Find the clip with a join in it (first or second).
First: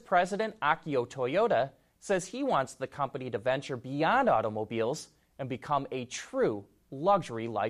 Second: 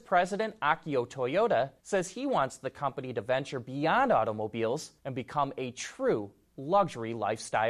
second